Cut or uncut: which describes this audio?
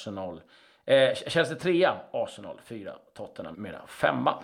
cut